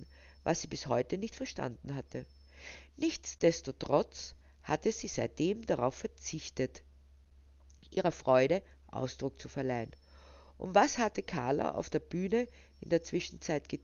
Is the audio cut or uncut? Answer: uncut